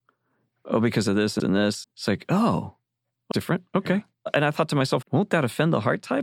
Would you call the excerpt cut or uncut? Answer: cut